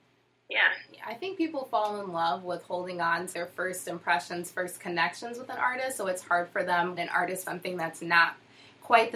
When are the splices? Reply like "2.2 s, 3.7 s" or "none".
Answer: 3.3 s, 7.0 s, 7.4 s